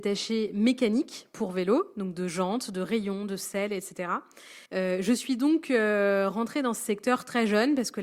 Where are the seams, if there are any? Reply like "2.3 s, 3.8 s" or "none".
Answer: 4.7 s